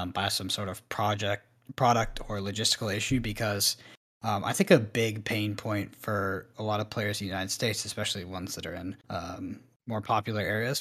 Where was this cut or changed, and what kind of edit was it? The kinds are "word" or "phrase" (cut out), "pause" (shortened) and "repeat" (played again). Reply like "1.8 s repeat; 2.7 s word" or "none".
9.0 s pause